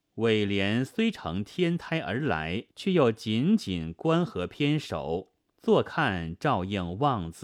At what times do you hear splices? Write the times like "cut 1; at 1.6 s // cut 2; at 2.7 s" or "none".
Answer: cut 1; at 2.7 s // cut 2; at 5.4 s